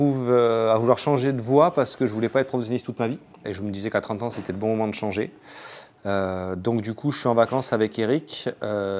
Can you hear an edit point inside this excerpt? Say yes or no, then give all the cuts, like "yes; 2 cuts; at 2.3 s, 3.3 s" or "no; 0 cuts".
no; 0 cuts